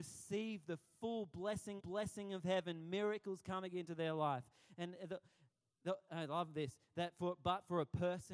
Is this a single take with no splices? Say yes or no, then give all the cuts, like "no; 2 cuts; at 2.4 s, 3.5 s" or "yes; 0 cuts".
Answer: no; 1 cut; at 1.8 s